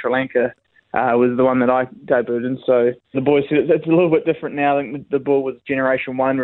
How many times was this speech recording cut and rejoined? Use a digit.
1